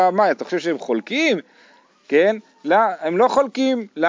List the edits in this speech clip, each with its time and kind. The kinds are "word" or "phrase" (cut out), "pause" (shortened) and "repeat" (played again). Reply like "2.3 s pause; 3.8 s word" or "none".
none